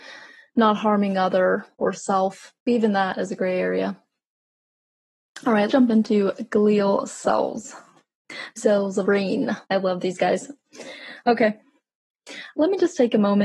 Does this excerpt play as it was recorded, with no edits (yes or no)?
no